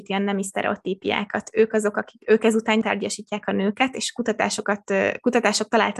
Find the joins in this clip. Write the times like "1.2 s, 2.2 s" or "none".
2.8 s